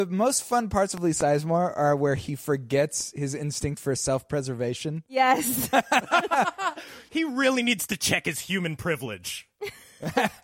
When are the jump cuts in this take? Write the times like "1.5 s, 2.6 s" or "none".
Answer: 7.1 s